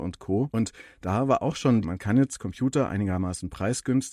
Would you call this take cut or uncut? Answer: cut